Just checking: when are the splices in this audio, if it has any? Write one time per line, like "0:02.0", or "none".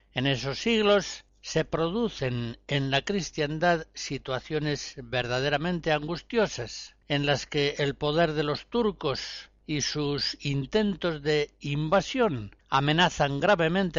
0:07.0
0:12.6